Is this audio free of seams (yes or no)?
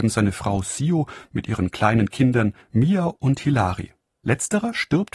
yes